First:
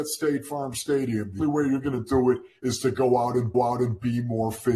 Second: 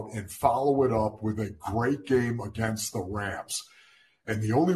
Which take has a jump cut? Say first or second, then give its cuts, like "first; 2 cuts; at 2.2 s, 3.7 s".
first; 2 cuts; at 1.4 s, 3.5 s